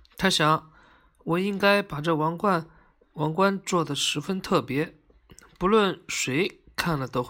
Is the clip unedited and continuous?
yes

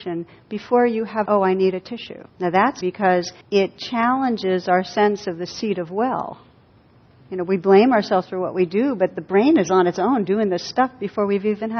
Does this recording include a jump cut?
yes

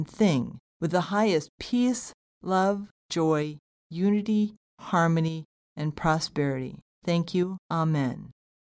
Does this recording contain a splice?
yes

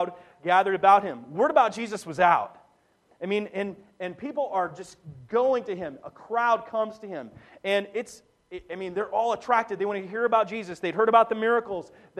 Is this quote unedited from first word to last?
yes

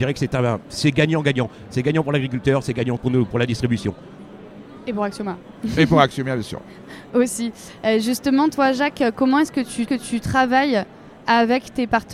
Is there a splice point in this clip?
yes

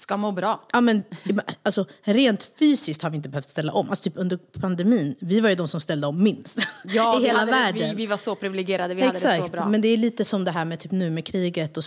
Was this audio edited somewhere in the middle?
no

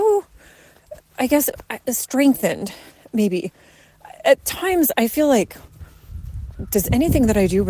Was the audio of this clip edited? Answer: no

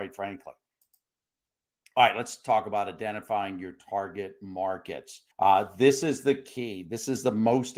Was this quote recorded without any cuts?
no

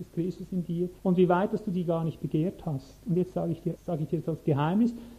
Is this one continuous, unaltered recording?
no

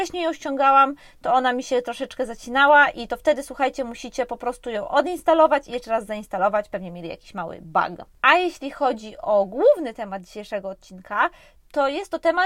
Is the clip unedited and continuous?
yes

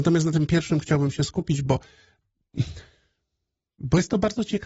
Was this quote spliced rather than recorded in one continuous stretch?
no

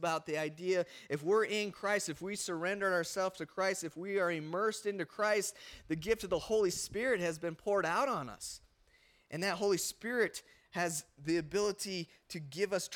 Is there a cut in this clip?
no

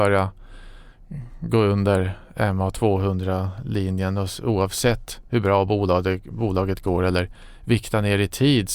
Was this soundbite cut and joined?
no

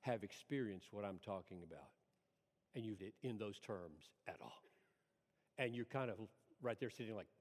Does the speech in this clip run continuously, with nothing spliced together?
no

